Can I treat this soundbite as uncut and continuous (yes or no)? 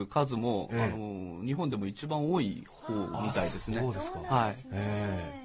yes